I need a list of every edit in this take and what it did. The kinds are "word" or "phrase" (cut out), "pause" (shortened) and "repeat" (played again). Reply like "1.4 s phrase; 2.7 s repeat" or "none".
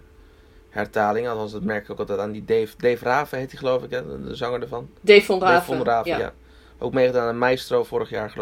none